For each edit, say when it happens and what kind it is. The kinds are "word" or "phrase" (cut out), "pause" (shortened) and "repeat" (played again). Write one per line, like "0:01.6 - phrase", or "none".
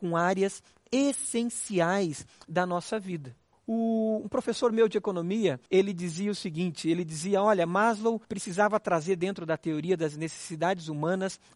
0:03.5 - pause
0:05.7 - pause
0:08.2 - pause